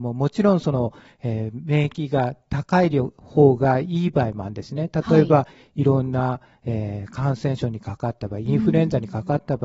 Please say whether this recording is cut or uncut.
uncut